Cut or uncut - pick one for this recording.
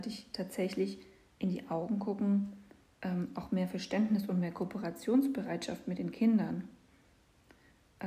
uncut